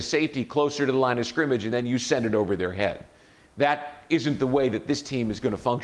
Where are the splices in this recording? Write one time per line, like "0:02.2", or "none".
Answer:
none